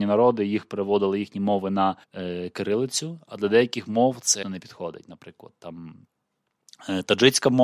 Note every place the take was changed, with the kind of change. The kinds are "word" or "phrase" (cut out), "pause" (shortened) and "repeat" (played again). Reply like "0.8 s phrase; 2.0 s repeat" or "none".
2.0 s pause; 4.4 s word